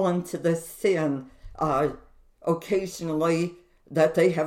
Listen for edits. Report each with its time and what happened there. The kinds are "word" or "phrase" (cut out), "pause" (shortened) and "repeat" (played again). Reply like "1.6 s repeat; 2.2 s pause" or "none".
none